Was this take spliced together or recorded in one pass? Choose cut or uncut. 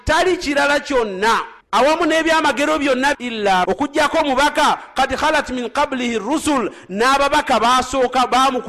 cut